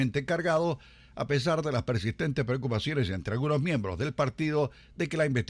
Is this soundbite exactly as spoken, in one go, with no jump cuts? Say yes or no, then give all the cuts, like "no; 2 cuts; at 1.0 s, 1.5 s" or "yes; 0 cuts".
yes; 0 cuts